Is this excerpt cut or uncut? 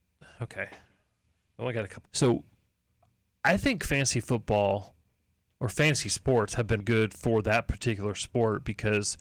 cut